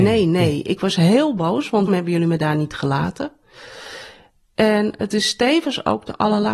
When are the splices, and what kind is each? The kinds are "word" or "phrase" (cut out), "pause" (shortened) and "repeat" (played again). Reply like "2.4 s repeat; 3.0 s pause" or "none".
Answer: 1.9 s word